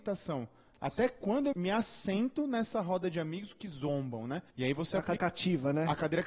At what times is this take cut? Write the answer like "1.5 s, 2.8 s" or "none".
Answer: 1.5 s, 4.5 s, 5.2 s